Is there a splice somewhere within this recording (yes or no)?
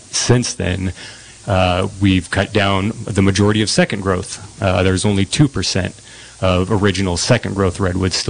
no